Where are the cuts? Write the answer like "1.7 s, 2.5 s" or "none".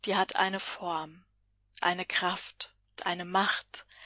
1.8 s, 3.0 s